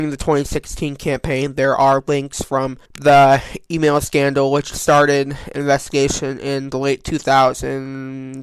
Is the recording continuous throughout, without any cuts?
no; 1 cut; at 2.9 s

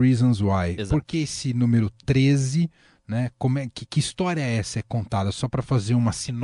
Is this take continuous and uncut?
yes; 0 cuts

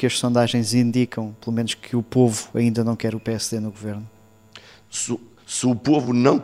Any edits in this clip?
no; 0 cuts

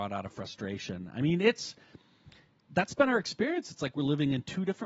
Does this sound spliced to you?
no; 0 cuts

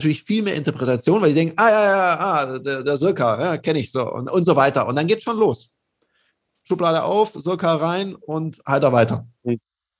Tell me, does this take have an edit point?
no; 0 cuts

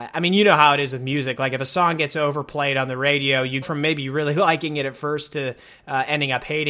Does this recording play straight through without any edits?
no; 1 cut; at 3.6 s

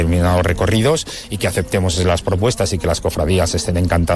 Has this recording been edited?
no; 0 cuts

